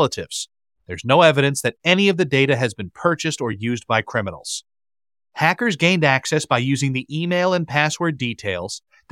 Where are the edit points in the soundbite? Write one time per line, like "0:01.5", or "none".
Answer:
none

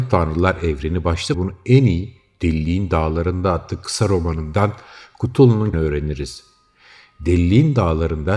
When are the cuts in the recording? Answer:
0:01.3
0:05.7

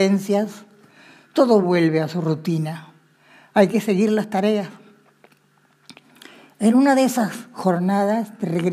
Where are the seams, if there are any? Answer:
none

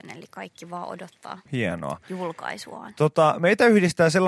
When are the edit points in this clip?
0:01.5

